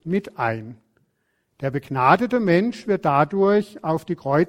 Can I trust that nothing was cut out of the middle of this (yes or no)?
yes